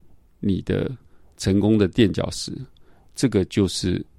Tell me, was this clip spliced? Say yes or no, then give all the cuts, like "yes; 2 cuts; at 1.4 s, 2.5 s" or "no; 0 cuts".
no; 0 cuts